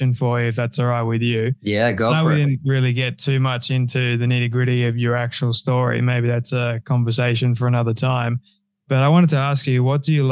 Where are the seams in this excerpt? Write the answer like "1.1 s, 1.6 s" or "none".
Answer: none